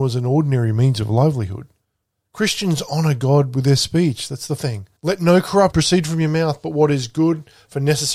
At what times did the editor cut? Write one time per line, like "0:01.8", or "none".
0:02.0
0:04.6
0:05.0
0:05.7